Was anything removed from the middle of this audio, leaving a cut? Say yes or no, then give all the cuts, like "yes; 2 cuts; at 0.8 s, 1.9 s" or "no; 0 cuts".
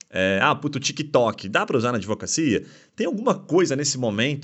no; 0 cuts